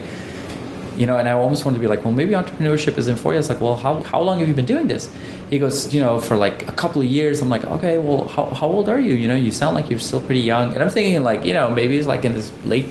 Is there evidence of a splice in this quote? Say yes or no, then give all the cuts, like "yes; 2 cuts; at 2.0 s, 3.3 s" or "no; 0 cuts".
no; 0 cuts